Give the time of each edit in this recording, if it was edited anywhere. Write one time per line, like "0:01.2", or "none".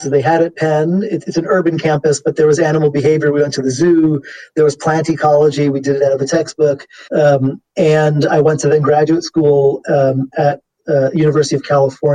0:07.1